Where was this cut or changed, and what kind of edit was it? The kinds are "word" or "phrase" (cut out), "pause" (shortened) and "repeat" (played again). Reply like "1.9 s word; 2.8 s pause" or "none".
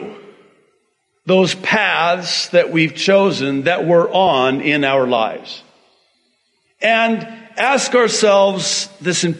none